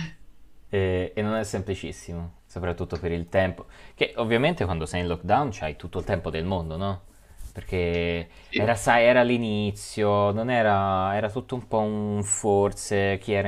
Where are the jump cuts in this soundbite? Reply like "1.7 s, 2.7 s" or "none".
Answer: 2.4 s